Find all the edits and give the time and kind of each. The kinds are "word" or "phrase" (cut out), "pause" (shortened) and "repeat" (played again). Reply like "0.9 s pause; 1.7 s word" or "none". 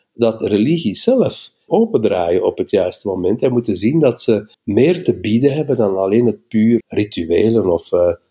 1.7 s phrase; 4.5 s pause; 6.8 s word